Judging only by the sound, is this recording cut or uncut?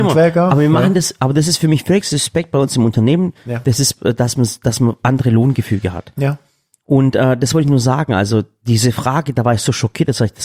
uncut